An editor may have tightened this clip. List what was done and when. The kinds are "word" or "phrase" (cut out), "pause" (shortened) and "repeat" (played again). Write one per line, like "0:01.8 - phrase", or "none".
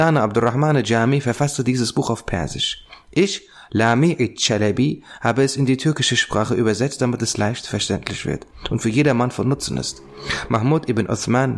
none